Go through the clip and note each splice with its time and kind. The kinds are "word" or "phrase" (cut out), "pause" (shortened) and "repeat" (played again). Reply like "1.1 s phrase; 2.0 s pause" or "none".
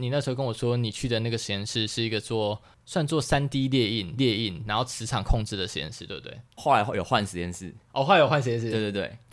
4.2 s repeat; 6.5 s pause